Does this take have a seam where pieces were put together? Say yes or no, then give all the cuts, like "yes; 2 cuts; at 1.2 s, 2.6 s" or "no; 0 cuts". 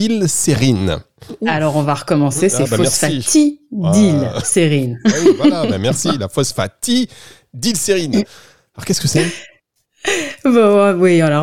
no; 0 cuts